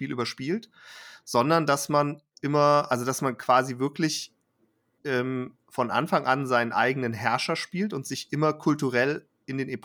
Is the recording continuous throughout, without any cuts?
yes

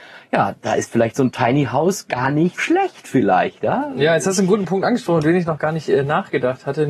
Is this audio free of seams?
no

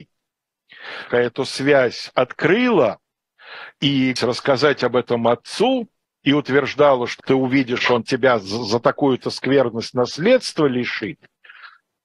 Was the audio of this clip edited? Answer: yes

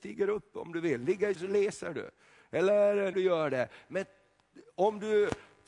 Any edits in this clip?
yes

